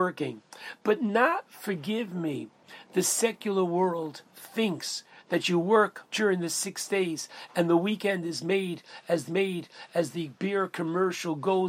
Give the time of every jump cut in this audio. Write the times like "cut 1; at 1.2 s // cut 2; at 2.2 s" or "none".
cut 1; at 1.5 s // cut 2; at 4.3 s // cut 3; at 6.1 s // cut 4; at 9.3 s